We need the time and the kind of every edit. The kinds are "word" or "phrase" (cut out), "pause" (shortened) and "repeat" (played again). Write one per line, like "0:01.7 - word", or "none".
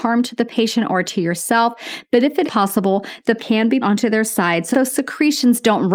0:02.4 - word
0:03.4 - word
0:03.8 - word
0:04.7 - word